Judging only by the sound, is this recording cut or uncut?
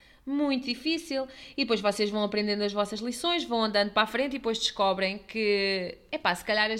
uncut